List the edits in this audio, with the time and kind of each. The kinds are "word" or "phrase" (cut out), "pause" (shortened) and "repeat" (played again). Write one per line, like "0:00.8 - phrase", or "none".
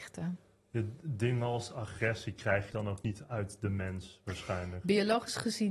0:02.7 - phrase